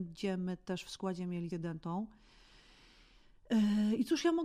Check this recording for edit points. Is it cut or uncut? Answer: cut